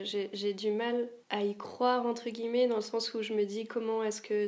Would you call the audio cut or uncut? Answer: cut